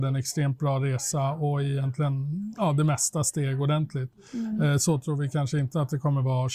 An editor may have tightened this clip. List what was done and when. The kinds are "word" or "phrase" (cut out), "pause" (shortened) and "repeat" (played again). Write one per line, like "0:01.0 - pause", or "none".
none